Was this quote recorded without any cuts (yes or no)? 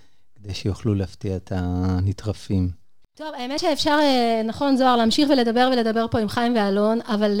yes